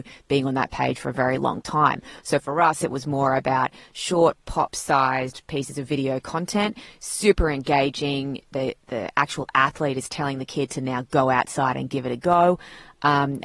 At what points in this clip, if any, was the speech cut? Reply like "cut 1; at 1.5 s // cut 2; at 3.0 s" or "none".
cut 1; at 2.2 s // cut 2; at 8.8 s